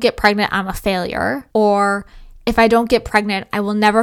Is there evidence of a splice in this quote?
yes; 1 cut; at 1.5 s

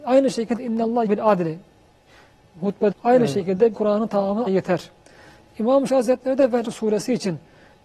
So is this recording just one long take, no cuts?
no; 6 cuts; at 1.1 s, 2.9 s, 3.7 s, 4.5 s, 5.9 s, 6.6 s

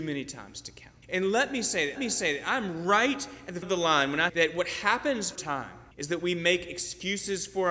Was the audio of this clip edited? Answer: yes; 6 cuts; at 1.0 s, 2.0 s, 3.6 s, 4.3 s, 5.4 s, 5.9 s

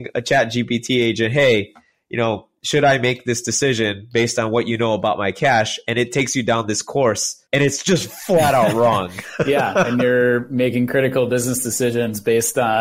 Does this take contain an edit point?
yes; 1 cut; at 7.5 s

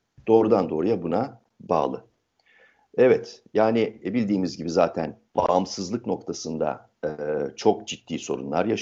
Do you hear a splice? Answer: yes; 1 cut; at 5.3 s

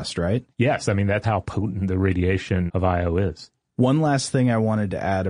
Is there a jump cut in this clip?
yes; 3 cuts; at 1.2 s, 2.7 s, 3.7 s

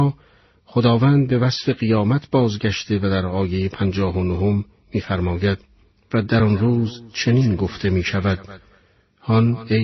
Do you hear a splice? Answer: no; 0 cuts

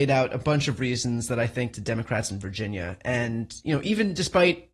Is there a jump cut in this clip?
yes; 2 cuts; at 1.7 s, 2.3 s

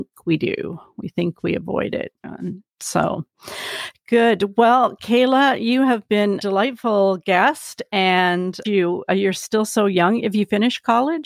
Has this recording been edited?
yes; 3 cuts; at 2.2 s, 6.4 s, 8.6 s

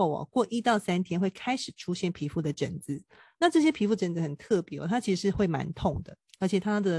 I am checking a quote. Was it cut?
no; 0 cuts

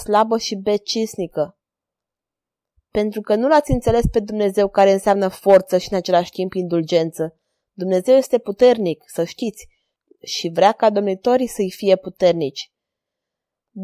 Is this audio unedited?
yes; 0 cuts

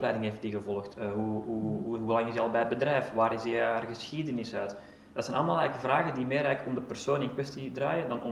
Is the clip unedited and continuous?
yes; 0 cuts

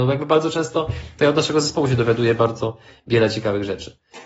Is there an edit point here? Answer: no; 0 cuts

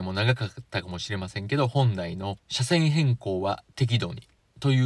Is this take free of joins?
no; 1 cut; at 2.4 s

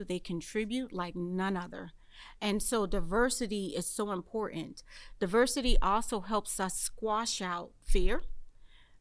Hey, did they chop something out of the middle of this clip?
no; 0 cuts

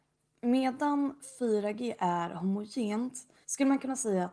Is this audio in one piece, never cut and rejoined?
no; 1 cut; at 3.4 s

